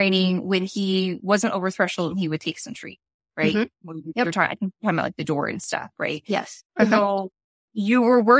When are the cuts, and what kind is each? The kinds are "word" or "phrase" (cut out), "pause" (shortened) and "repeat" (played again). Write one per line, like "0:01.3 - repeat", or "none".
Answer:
none